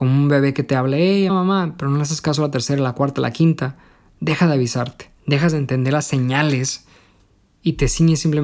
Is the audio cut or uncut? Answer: cut